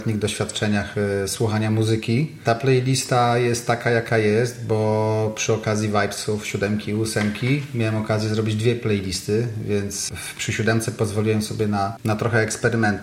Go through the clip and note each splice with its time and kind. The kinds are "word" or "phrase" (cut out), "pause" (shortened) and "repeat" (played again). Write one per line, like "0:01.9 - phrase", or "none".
none